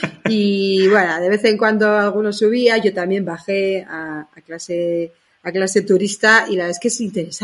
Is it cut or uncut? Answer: uncut